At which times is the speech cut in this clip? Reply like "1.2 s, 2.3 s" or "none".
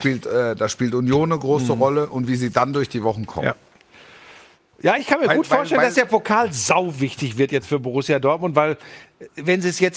none